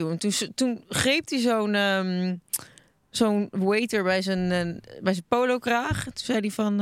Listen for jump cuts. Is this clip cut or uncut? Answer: uncut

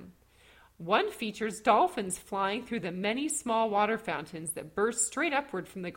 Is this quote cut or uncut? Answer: uncut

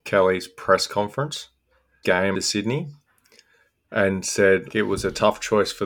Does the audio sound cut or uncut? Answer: cut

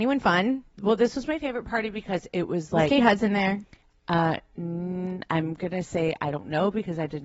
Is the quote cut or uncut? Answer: uncut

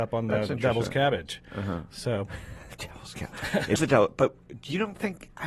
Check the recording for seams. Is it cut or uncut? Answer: cut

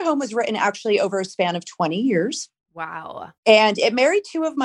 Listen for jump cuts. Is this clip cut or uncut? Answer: cut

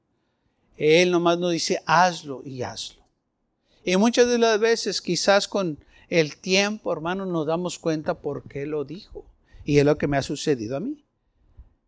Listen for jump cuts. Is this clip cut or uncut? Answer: uncut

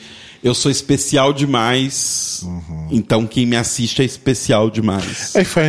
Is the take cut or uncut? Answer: uncut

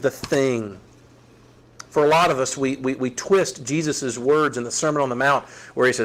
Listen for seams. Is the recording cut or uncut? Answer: uncut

